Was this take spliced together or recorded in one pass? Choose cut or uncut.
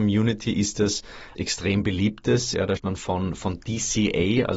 cut